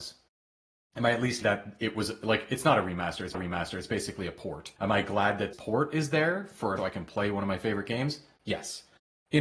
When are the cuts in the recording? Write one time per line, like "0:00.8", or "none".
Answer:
0:01.4
0:03.3
0:04.8
0:05.5
0:06.8